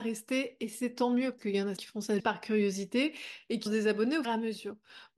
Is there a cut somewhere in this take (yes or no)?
yes